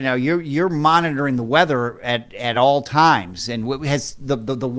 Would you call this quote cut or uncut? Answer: uncut